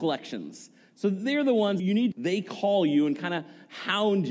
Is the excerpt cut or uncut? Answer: cut